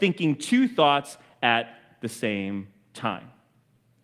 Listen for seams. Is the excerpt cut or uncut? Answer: uncut